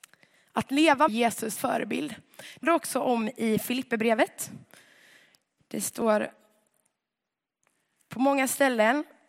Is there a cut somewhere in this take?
yes; 3 cuts; at 1.1 s, 1.6 s, 2.6 s

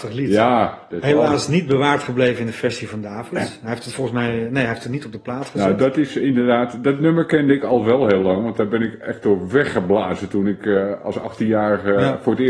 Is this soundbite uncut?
yes; 0 cuts

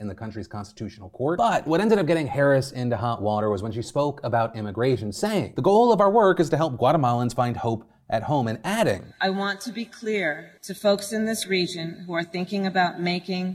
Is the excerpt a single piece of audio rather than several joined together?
no; 1 cut; at 10.6 s

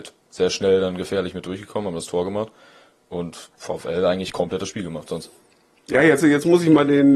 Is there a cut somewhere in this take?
no; 0 cuts

